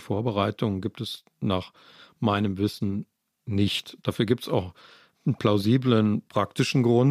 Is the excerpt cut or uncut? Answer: uncut